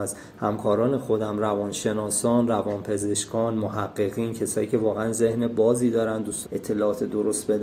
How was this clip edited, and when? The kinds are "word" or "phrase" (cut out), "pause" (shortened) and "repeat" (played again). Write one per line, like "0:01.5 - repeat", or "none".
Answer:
0:06.4 - word